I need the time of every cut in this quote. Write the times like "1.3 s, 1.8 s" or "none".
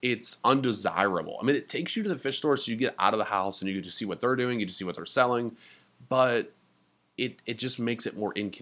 none